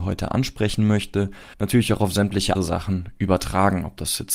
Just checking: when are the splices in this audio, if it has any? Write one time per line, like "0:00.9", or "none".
0:01.5
0:02.5